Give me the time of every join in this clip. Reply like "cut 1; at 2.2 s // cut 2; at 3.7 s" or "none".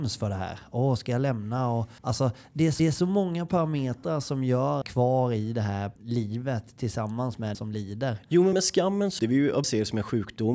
cut 1; at 2.0 s // cut 2; at 2.8 s // cut 3; at 4.8 s // cut 4; at 6.0 s // cut 5; at 7.5 s // cut 6; at 8.5 s // cut 7; at 9.2 s // cut 8; at 9.6 s